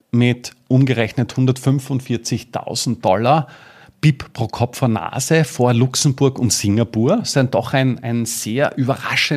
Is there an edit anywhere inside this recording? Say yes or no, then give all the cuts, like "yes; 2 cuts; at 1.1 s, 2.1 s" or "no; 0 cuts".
no; 0 cuts